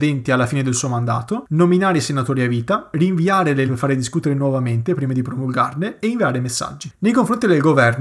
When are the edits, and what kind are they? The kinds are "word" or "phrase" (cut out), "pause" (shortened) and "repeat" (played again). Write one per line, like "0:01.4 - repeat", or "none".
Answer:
0:03.7 - word